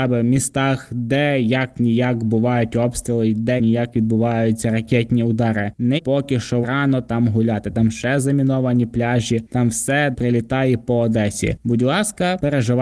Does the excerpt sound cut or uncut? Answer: cut